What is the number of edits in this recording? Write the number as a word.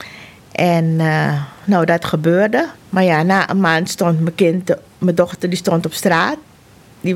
one